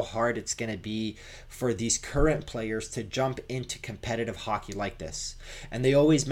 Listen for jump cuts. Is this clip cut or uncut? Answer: uncut